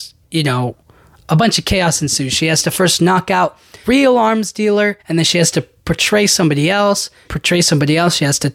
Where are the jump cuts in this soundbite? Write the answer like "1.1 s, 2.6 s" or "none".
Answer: 3.8 s, 5.0 s, 7.2 s